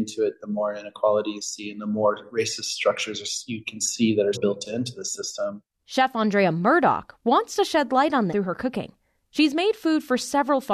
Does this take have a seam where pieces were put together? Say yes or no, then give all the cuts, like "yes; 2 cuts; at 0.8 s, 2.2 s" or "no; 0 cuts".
yes; 2 cuts; at 4.3 s, 8.3 s